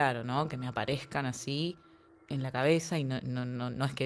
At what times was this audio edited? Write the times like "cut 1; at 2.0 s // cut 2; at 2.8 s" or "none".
none